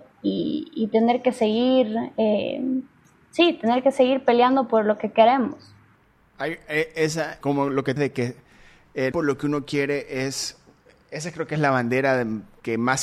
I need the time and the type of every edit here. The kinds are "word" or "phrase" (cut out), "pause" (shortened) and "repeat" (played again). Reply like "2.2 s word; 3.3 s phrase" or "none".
7.4 s word; 8.0 s word; 9.1 s word